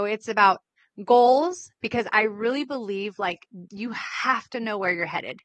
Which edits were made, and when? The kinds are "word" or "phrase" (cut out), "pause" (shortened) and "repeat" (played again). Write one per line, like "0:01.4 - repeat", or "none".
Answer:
none